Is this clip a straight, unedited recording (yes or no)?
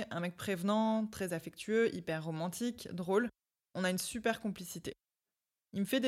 yes